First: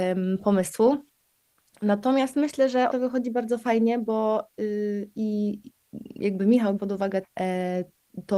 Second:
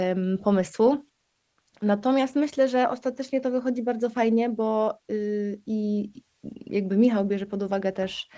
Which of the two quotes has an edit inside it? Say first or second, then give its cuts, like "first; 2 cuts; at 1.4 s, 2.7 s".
first; 3 cuts; at 2.9 s, 6.8 s, 7.2 s